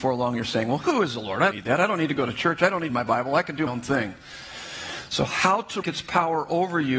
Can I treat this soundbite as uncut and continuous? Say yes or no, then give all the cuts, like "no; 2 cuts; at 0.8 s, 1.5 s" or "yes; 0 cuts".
no; 4 cuts; at 1.5 s, 2.9 s, 3.7 s, 5.8 s